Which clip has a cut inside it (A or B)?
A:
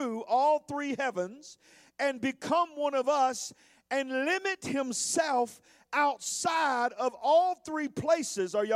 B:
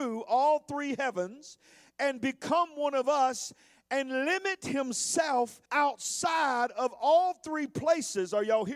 B